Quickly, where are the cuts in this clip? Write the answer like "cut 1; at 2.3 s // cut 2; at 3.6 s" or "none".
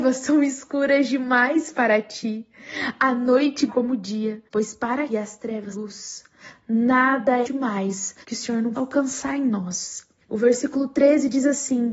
cut 1; at 3.7 s // cut 2; at 4.5 s // cut 3; at 5.1 s // cut 4; at 5.7 s // cut 5; at 7.4 s // cut 6; at 8.2 s // cut 7; at 8.7 s // cut 8; at 10.2 s